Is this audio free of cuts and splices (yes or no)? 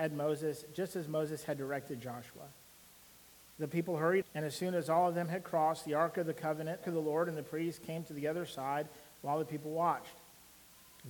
no